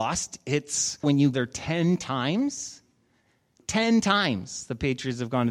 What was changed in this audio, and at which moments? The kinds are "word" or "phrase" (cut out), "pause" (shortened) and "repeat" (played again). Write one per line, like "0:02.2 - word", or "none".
0:01.0 - word
0:01.3 - word